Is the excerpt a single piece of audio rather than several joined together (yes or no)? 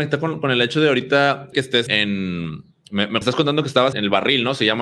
no